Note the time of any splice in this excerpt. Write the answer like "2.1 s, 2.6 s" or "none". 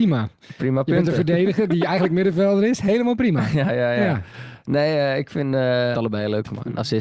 5.9 s